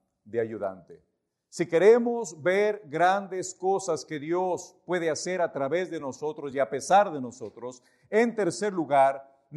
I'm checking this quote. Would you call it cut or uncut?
uncut